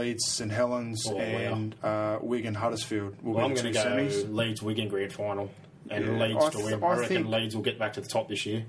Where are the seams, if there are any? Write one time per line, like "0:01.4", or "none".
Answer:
none